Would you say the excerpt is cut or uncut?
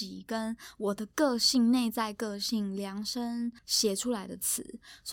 cut